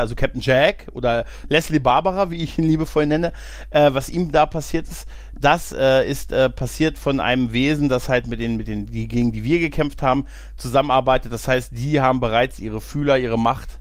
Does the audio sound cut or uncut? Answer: uncut